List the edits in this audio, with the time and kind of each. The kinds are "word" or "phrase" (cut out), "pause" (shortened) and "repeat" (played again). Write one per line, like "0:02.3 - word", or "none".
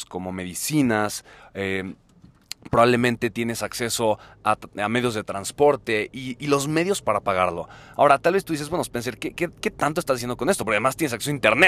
none